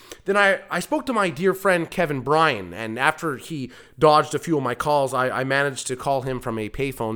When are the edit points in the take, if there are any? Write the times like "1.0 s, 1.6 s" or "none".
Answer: none